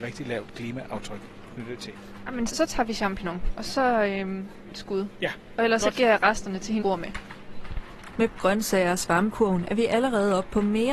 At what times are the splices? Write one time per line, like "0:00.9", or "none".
0:02.5
0:04.7
0:06.8
0:08.3
0:09.3